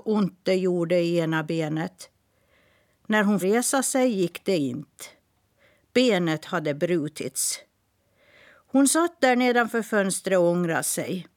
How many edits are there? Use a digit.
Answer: 1